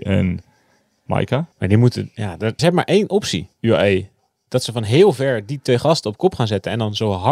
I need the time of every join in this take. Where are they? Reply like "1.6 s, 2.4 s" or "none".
1.5 s, 2.6 s, 3.5 s